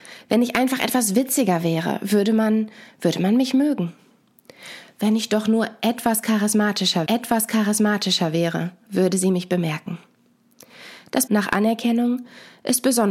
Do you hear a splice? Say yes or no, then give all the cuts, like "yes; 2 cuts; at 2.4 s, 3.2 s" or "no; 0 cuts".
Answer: yes; 2 cuts; at 7.1 s, 11.3 s